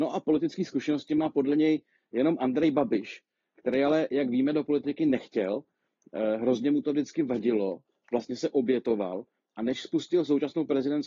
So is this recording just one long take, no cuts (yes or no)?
yes